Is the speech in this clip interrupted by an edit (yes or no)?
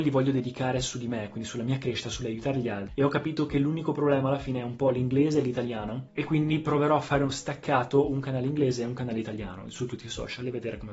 no